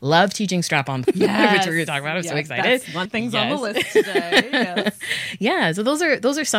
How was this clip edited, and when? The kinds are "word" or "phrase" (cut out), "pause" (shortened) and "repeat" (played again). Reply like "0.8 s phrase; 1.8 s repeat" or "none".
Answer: 1.0 s word; 3.1 s word